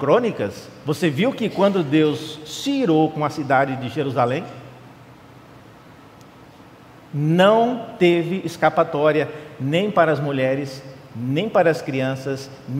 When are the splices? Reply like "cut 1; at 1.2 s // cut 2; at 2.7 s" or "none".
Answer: none